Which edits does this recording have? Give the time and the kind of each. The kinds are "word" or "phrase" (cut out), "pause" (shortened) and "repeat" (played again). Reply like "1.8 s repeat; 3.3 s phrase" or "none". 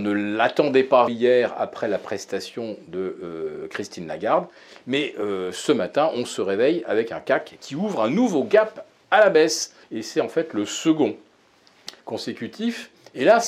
1.1 s word; 9.8 s pause; 12.0 s pause